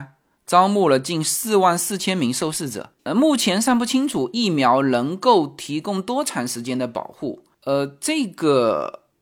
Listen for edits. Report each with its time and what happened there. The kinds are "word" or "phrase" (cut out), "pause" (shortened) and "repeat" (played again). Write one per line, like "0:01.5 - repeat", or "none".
0:03.0 - pause